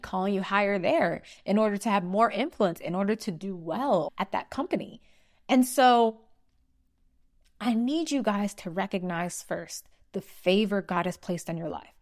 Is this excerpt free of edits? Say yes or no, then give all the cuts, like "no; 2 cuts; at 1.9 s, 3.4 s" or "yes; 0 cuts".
yes; 0 cuts